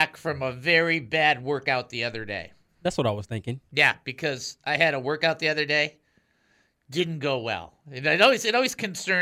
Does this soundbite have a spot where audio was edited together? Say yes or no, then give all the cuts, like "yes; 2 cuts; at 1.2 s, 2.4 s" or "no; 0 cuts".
no; 0 cuts